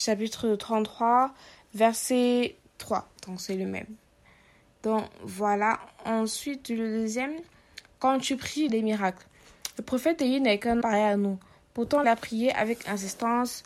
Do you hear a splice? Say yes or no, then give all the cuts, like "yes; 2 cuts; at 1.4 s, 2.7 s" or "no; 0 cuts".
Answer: yes; 4 cuts; at 3.2 s, 8.7 s, 10.8 s, 12.0 s